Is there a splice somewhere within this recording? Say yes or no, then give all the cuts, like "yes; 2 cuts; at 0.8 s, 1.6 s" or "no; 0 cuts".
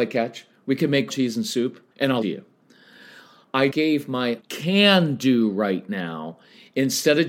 yes; 5 cuts; at 1.1 s, 1.9 s, 2.2 s, 3.7 s, 4.4 s